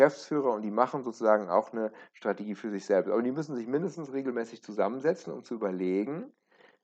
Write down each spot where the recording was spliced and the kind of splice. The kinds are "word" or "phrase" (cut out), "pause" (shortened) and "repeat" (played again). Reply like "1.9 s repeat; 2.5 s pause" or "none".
none